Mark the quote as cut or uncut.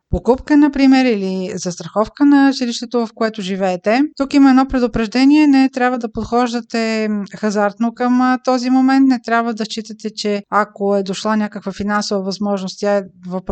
cut